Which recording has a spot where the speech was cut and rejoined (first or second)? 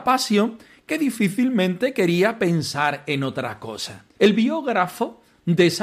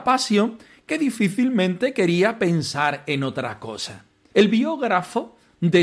first